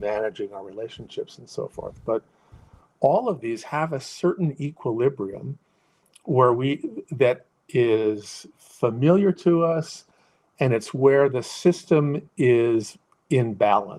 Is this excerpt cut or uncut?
uncut